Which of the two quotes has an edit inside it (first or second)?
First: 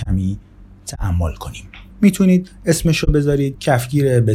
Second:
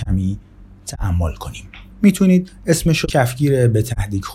second